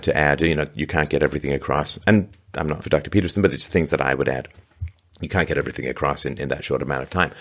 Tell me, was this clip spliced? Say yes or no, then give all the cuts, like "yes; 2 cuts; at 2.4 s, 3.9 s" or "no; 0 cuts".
yes; 1 cut; at 2.8 s